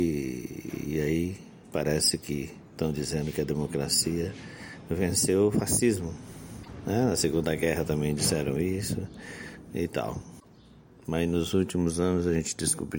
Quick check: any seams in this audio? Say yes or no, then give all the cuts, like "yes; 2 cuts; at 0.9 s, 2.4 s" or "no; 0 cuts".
no; 0 cuts